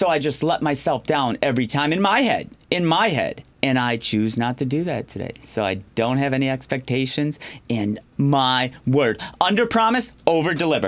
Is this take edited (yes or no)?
yes